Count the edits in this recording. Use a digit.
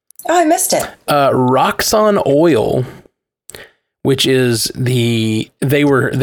0